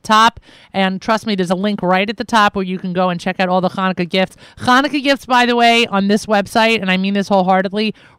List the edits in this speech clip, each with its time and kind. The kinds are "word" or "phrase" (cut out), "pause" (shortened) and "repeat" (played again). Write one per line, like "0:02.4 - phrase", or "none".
none